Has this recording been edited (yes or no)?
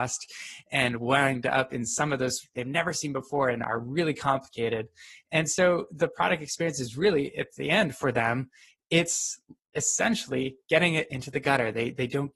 yes